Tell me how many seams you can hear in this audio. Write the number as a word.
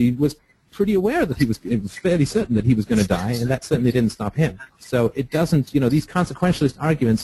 one